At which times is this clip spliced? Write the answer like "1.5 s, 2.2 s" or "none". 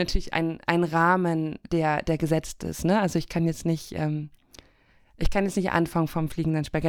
none